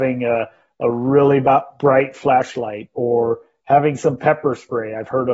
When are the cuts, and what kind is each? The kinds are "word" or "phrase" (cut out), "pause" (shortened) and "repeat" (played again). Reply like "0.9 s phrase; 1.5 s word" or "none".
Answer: none